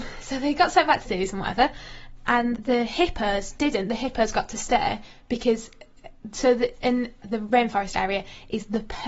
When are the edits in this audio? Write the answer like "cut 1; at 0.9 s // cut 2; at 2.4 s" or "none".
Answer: cut 1; at 1.0 s // cut 2; at 2.5 s // cut 3; at 7.2 s